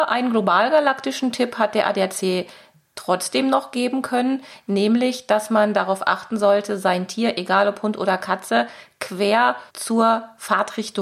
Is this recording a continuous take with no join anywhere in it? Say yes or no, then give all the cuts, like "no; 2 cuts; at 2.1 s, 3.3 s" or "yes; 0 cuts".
no; 1 cut; at 9.7 s